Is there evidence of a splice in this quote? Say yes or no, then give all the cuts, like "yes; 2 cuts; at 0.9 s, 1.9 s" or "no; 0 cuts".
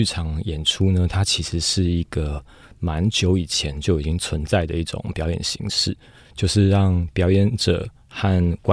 no; 0 cuts